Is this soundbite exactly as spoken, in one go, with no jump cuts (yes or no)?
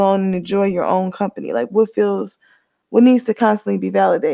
yes